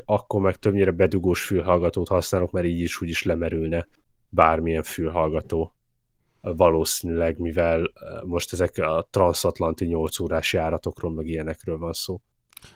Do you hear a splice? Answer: no; 0 cuts

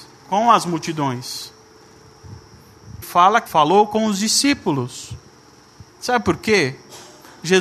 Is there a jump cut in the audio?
yes; 3 cuts; at 3.0 s, 3.5 s, 5.9 s

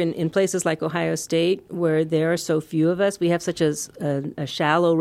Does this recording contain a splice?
no; 0 cuts

